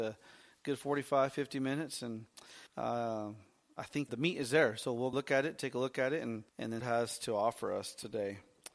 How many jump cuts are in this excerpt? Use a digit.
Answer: 5